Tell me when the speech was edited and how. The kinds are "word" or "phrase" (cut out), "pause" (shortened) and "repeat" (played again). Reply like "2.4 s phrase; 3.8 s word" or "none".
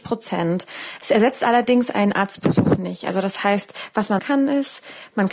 4.2 s word